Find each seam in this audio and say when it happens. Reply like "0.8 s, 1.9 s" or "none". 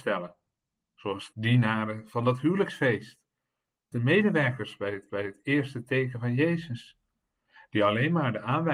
1.3 s, 3.9 s, 5.1 s